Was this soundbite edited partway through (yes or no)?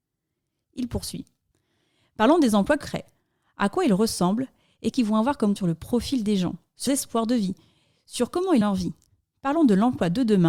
yes